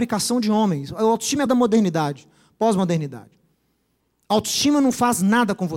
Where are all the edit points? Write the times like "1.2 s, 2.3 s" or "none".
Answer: 1.5 s, 4.0 s